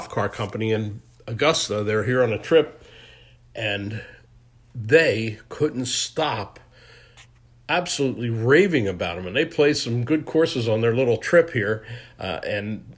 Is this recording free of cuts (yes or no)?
yes